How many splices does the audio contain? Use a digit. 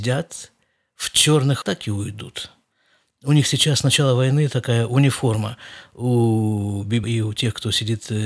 2